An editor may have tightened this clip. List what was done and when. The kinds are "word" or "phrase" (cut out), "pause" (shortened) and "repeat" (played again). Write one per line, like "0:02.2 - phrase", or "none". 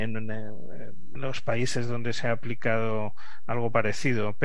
0:01.2 - word